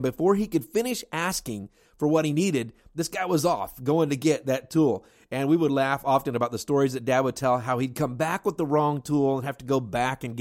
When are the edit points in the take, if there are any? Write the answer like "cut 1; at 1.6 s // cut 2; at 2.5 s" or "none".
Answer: none